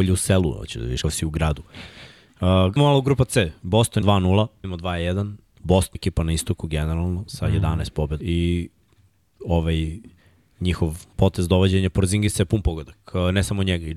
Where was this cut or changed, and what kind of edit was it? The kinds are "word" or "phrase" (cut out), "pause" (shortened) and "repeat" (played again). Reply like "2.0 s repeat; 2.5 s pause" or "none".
1.0 s word; 2.8 s word; 4.0 s word; 4.6 s word; 5.9 s phrase; 8.2 s phrase; 11.1 s pause